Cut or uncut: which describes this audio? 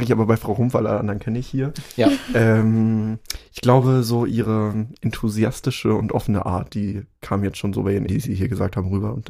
cut